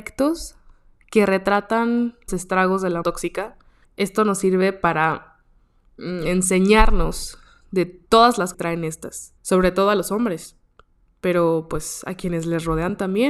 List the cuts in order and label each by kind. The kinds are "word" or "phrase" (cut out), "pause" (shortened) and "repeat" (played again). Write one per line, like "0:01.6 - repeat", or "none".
0:02.3 - word
0:03.0 - word
0:03.8 - pause
0:08.5 - phrase
0:09.4 - pause